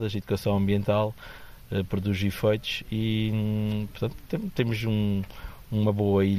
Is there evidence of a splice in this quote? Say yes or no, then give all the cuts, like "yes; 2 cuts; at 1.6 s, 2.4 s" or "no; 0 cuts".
no; 0 cuts